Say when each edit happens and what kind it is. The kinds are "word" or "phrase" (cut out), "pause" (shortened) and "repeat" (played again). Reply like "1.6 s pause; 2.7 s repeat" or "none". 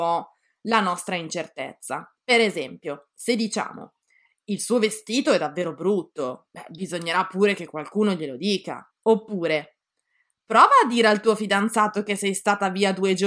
2.2 s pause; 8.9 s pause